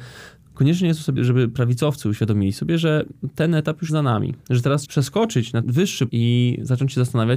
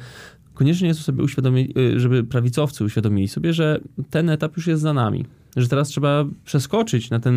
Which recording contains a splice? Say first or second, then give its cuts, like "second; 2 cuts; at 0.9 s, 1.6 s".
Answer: first; 6 cuts; at 1.2 s, 3.9 s, 4.4 s, 4.8 s, 5.6 s, 6.1 s